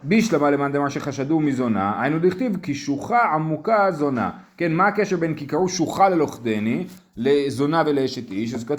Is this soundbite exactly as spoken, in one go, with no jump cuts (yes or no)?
yes